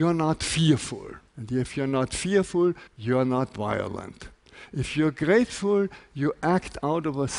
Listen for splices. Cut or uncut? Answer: cut